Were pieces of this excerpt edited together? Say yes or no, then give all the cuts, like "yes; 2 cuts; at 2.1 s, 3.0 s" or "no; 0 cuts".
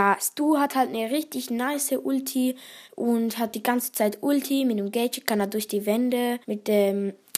yes; 2 cuts; at 2.8 s, 6.4 s